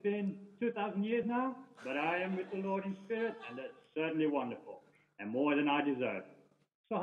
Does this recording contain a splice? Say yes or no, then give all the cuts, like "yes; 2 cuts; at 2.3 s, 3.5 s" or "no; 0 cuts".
no; 0 cuts